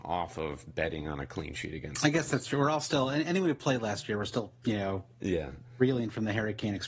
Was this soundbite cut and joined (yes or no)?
no